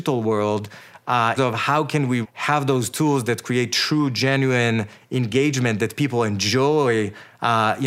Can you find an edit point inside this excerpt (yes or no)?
yes